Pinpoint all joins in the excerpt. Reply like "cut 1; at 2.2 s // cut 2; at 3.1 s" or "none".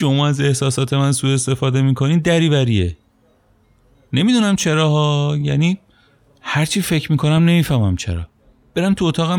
none